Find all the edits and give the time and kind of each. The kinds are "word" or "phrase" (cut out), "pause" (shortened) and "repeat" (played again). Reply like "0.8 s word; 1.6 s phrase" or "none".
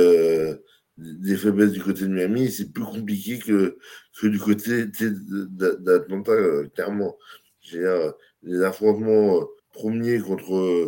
9.6 s pause

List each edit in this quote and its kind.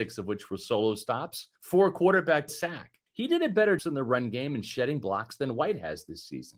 1.6 s pause; 2.5 s phrase; 3.1 s pause; 3.8 s phrase

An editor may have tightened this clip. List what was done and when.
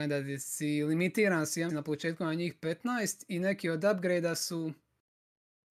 1.7 s word

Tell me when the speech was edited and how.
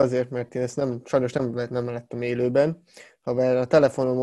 none

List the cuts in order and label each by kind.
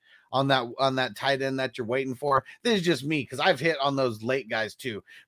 none

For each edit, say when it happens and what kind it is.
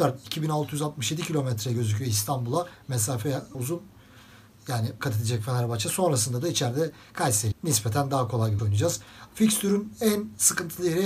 3.5 s word; 5.0 s phrase; 7.5 s word; 8.6 s word

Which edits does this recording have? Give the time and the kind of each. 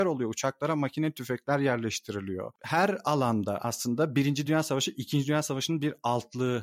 none

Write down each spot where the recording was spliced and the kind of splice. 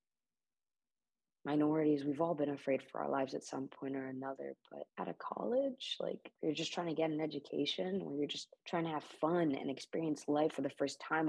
4.9 s pause; 6.4 s pause; 8.6 s pause

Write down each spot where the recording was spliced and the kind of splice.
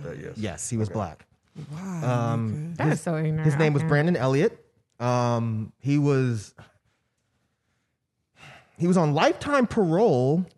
none

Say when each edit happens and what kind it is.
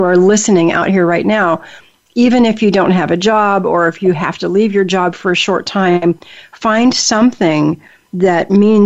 none

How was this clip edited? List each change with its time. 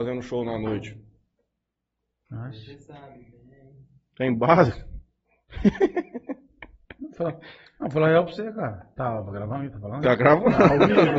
none

